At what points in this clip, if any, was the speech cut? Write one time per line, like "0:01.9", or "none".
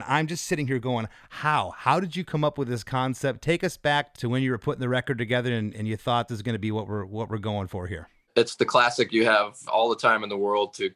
0:04.1
0:05.7
0:06.3
0:09.7